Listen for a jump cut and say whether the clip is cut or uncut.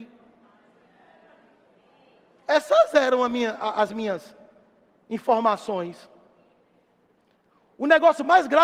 uncut